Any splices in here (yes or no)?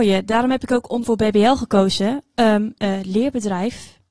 yes